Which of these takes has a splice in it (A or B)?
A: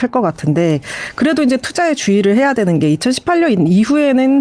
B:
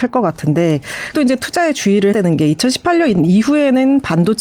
B